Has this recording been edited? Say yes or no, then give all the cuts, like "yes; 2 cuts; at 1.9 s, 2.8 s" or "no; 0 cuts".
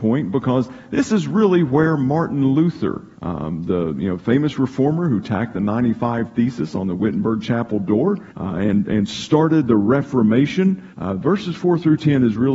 yes; 3 cuts; at 3.1 s, 8.3 s, 10.9 s